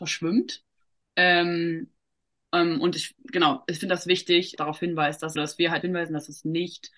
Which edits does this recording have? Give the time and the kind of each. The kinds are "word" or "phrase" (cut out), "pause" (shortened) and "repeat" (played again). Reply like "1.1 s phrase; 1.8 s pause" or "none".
4.6 s phrase; 5.4 s phrase; 5.8 s phrase